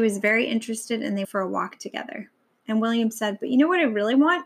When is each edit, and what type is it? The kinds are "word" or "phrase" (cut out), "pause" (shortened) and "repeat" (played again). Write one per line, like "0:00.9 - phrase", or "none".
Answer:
0:01.2 - word